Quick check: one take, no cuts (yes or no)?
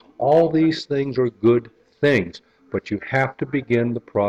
yes